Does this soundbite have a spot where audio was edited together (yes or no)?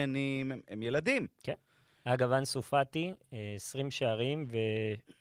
no